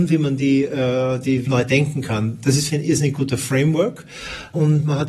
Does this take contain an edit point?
yes; 2 cuts; at 1.4 s, 2.7 s

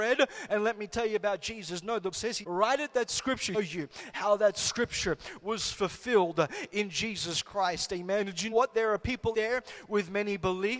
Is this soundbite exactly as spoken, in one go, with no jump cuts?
no; 5 cuts; at 2.1 s, 2.4 s, 3.5 s, 8.5 s, 9.3 s

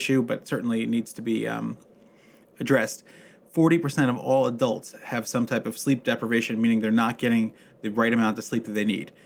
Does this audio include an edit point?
no; 0 cuts

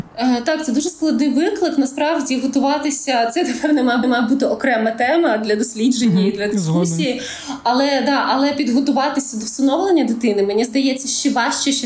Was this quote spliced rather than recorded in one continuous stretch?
yes; 1 cut; at 4.0 s

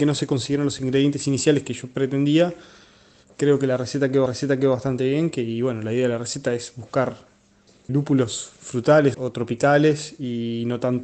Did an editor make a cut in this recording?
yes; 3 cuts; at 4.3 s, 7.9 s, 9.1 s

